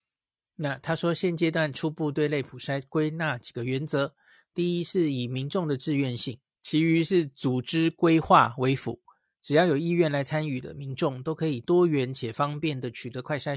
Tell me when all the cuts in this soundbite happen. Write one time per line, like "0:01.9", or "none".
0:06.5